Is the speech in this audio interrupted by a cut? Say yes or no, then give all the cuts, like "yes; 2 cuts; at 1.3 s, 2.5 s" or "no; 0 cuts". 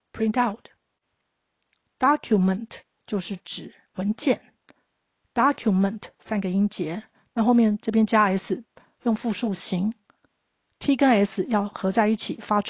no; 0 cuts